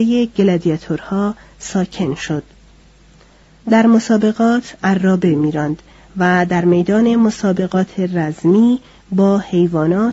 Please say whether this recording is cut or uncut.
uncut